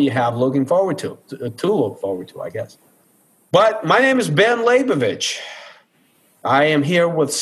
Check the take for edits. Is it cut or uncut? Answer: cut